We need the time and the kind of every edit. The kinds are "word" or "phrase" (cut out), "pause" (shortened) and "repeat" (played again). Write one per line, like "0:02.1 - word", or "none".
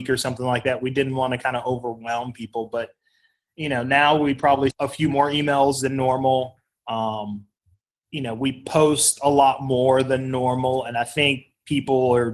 0:04.7 - word